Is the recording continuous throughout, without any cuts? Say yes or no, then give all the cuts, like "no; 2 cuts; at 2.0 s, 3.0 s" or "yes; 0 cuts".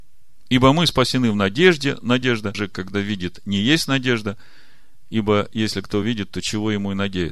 yes; 0 cuts